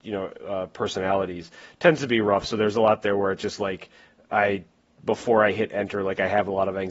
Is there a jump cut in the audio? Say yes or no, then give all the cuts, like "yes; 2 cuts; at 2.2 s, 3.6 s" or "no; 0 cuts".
no; 0 cuts